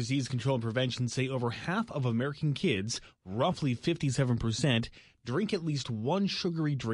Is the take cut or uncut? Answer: uncut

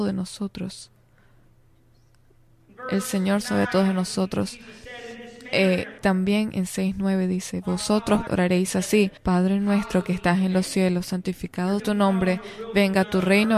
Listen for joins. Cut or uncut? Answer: cut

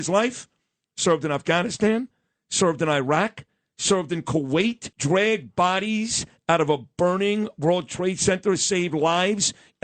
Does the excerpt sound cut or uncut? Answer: cut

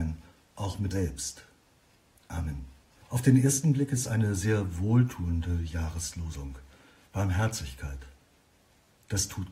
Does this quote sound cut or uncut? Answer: cut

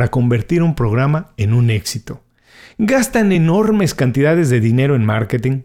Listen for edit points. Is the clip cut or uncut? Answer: uncut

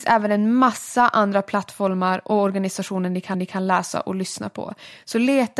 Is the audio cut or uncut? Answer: cut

